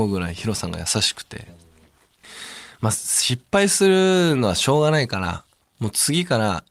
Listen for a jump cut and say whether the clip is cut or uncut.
uncut